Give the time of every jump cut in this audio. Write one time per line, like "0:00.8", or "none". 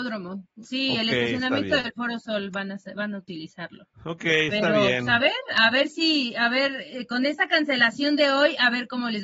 0:03.9